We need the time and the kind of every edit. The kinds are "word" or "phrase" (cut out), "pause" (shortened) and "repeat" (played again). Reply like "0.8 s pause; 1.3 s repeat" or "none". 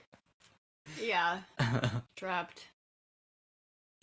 2.1 s pause

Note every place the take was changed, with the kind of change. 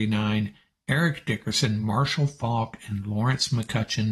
none

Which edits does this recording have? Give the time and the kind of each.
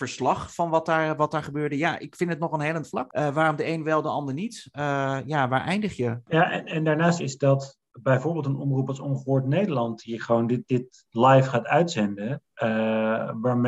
7.2 s phrase

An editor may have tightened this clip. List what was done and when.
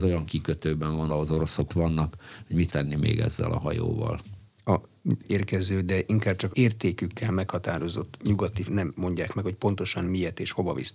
1.1 s word; 1.7 s word; 2.7 s word; 5.2 s word; 6.5 s word; 8.7 s word

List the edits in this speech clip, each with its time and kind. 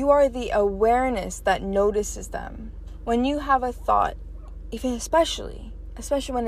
none

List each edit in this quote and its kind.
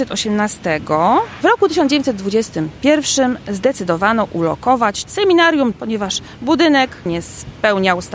1.4 s word; 5.0 s word; 5.7 s word; 7.1 s word

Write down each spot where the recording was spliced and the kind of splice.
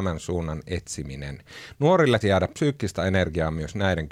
2.2 s word

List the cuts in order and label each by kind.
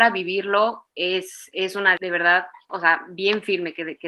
2.0 s word; 2.7 s word

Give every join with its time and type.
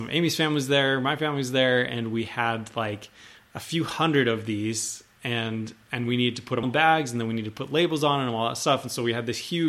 6.6 s word

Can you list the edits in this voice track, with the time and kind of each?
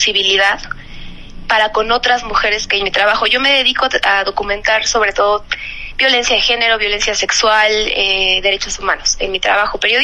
2.8 s phrase

